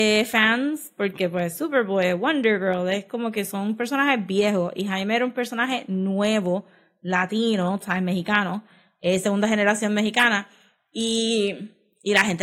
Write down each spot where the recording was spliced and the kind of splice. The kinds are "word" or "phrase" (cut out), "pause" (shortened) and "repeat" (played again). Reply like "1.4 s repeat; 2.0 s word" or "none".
none